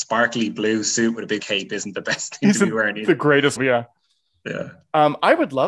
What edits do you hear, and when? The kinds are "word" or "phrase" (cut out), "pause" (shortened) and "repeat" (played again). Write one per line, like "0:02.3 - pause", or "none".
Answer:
0:01.4 - word
0:03.6 - word